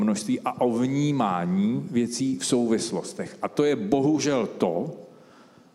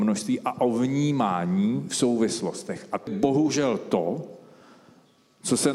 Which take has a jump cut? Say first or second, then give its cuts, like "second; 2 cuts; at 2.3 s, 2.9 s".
second; 2 cuts; at 1.9 s, 3.1 s